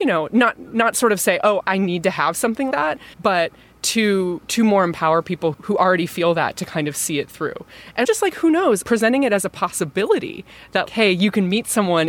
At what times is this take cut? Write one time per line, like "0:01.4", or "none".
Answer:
0:01.6
0:02.7
0:03.1
0:05.5
0:08.0
0:08.8
0:10.9